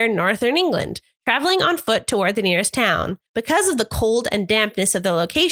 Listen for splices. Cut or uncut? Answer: cut